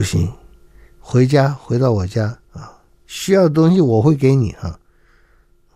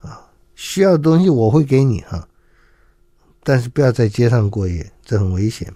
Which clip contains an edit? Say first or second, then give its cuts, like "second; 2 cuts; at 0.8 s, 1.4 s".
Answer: first; 1 cut; at 2.4 s